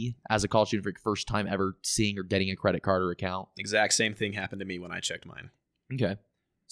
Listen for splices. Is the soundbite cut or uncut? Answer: uncut